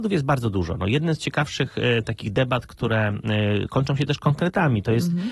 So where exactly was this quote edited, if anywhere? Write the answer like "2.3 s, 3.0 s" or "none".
none